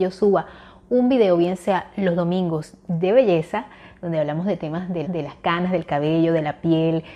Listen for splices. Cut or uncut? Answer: cut